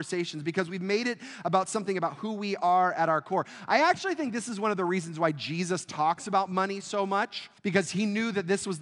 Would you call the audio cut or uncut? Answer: cut